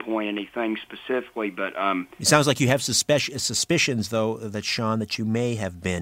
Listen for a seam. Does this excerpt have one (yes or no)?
no